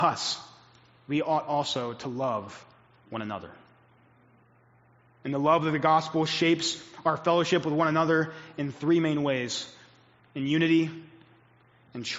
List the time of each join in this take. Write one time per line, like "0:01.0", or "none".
none